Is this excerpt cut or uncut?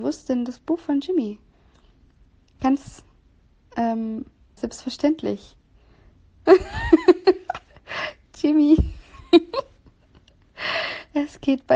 cut